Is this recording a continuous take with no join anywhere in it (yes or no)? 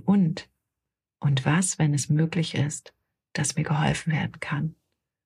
yes